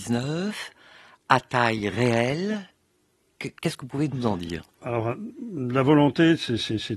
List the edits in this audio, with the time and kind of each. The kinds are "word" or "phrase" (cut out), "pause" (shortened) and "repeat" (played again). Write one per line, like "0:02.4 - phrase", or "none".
0:04.7 - pause